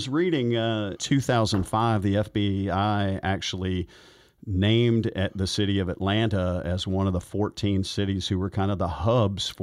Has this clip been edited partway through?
yes; 1 cut; at 1.0 s

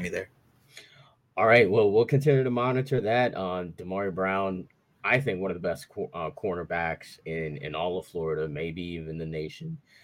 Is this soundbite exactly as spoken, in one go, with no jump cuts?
yes; 0 cuts

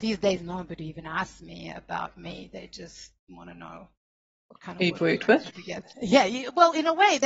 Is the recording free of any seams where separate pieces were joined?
no; 1 cut; at 5.5 s

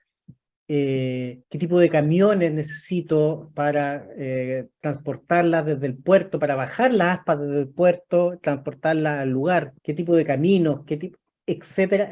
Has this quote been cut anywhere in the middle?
yes; 2 cuts; at 1.4 s, 9.8 s

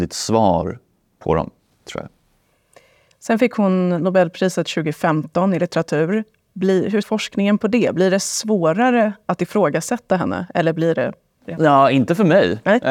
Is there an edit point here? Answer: yes; 1 cut; at 7.0 s

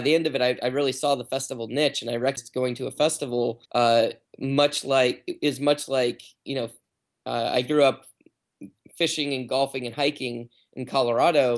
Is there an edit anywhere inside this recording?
yes; 1 cut; at 3.7 s

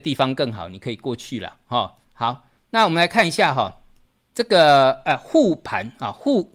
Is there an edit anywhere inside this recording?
yes; 2 cuts; at 2.0 s, 4.0 s

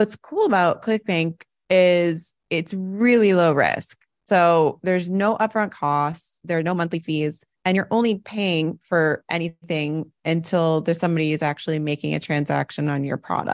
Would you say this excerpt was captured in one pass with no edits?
yes; 0 cuts

